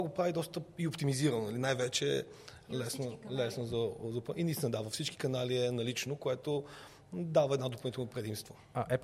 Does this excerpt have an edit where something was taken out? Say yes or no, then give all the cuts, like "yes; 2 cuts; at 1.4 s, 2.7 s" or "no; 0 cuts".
no; 0 cuts